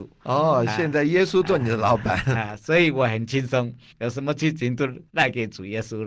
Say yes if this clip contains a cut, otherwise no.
yes